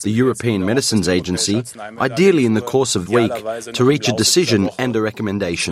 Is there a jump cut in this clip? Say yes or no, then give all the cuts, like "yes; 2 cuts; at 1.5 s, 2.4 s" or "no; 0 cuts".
yes; 1 cut; at 3.1 s